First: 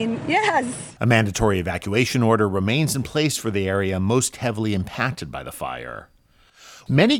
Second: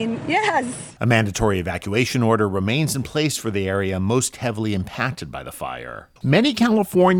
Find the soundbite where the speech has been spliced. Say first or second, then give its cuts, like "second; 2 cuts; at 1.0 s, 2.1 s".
second; 1 cut; at 6.2 s